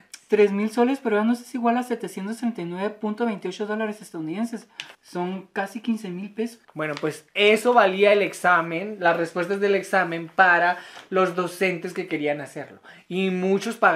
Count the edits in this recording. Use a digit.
2